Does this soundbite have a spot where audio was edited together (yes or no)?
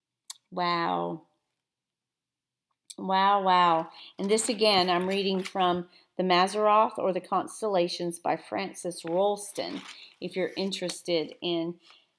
no